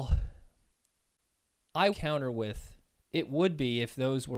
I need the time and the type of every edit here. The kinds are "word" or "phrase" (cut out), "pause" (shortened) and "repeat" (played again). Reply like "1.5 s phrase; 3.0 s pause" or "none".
1.9 s phrase; 3.0 s pause